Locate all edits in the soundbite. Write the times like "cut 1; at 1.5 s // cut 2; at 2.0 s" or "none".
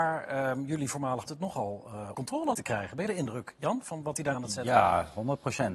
cut 1; at 1.3 s // cut 2; at 2.1 s // cut 3; at 2.5 s // cut 4; at 3.1 s // cut 5; at 3.8 s // cut 6; at 4.3 s